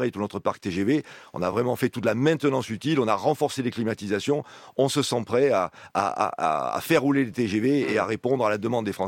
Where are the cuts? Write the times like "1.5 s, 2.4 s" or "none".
none